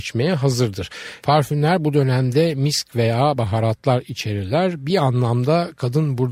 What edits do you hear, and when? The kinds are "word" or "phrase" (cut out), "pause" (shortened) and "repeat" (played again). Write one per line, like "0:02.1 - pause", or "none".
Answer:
none